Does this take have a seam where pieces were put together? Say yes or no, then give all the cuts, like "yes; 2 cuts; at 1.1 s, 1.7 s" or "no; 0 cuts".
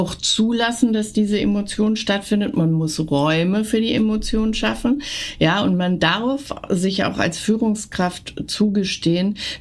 no; 0 cuts